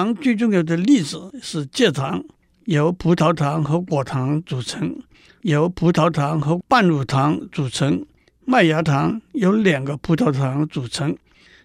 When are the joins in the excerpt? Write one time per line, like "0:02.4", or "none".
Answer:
none